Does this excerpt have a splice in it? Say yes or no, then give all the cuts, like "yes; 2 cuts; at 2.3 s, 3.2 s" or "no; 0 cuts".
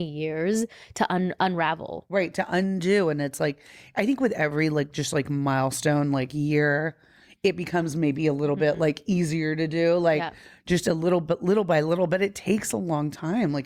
no; 0 cuts